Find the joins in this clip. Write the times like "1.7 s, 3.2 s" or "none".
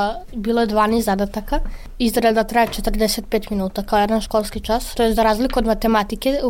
4.9 s